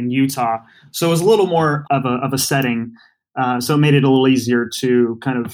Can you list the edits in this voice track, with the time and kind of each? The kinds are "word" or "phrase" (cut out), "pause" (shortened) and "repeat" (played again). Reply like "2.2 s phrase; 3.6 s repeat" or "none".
1.8 s word